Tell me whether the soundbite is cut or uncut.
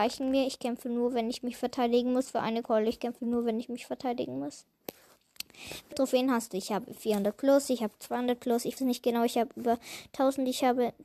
cut